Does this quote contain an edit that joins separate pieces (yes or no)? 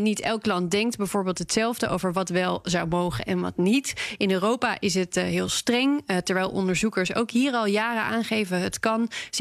no